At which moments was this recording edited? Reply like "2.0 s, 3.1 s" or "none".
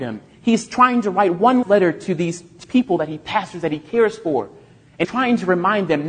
1.6 s, 2.6 s, 5.0 s